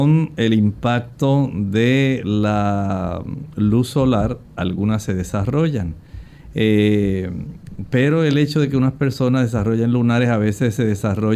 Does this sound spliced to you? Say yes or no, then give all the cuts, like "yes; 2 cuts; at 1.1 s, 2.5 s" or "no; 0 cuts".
no; 0 cuts